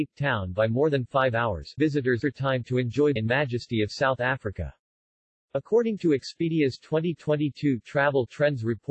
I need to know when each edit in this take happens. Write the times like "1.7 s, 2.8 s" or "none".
1.8 s, 2.2 s, 3.2 s